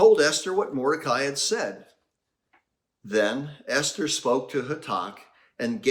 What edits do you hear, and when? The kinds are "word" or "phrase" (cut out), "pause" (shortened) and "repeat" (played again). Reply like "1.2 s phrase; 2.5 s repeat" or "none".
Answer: none